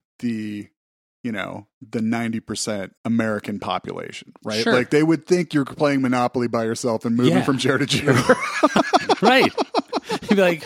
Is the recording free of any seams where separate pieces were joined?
no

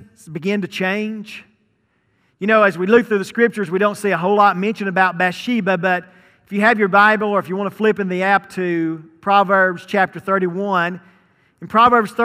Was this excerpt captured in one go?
yes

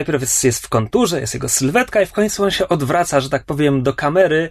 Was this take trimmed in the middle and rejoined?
no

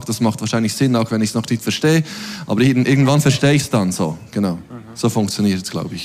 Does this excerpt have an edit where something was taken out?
no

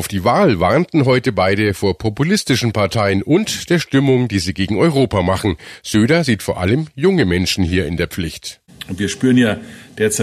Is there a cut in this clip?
no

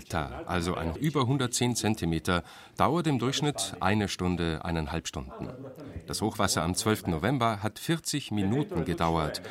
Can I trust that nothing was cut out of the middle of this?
no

